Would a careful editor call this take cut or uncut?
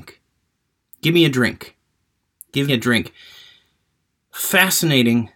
cut